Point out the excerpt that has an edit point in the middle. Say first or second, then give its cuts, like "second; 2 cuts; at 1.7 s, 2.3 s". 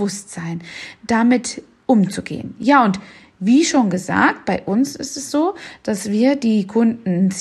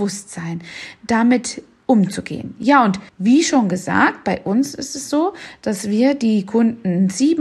second; 1 cut; at 3.1 s